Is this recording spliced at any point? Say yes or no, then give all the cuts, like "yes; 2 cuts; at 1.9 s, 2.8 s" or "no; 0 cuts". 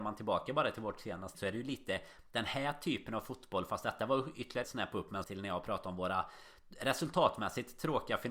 yes; 3 cuts; at 1.3 s, 4.6 s, 5.2 s